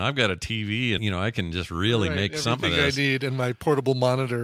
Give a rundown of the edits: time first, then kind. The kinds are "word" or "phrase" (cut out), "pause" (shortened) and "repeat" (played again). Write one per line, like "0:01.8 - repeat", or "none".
0:01.0 - word